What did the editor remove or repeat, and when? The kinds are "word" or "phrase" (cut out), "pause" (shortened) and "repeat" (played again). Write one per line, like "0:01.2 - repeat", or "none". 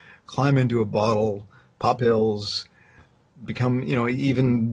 0:02.0 - word